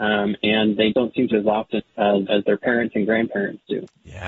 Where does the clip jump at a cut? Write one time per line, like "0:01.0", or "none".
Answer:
0:00.9
0:01.3
0:01.8
0:02.3